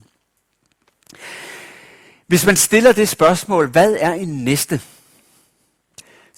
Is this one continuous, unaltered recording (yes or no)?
yes